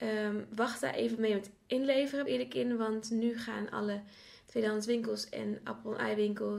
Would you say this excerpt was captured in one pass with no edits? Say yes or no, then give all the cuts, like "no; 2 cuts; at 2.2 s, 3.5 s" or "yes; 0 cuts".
no; 1 cut; at 2.3 s